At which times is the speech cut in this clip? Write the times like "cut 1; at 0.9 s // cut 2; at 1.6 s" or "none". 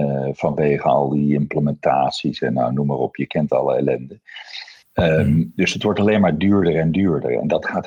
cut 1; at 4.8 s